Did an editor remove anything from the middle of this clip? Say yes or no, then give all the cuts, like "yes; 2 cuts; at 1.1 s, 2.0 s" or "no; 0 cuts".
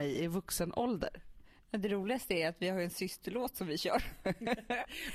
no; 0 cuts